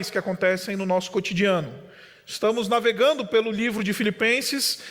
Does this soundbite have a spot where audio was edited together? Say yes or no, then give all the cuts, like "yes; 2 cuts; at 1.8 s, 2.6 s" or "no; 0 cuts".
no; 0 cuts